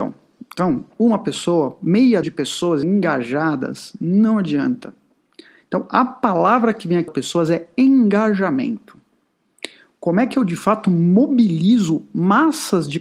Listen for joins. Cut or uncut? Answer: cut